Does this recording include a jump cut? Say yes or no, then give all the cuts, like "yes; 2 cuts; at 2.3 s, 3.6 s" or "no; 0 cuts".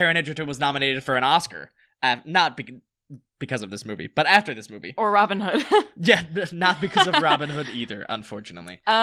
no; 0 cuts